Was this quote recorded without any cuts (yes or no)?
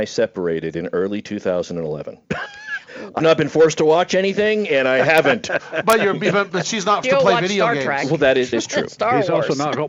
no